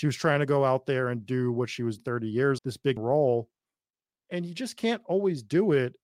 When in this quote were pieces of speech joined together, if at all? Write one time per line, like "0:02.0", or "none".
0:02.0
0:02.6
0:03.0